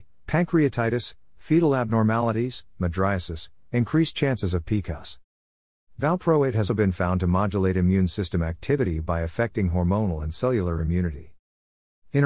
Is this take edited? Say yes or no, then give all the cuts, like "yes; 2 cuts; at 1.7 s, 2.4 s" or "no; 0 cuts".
yes; 1 cut; at 6.7 s